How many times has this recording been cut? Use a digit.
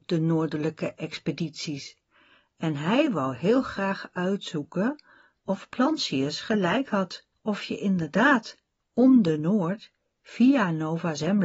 1